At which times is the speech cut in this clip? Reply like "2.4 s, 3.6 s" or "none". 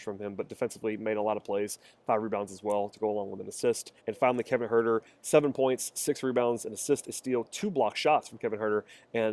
4.0 s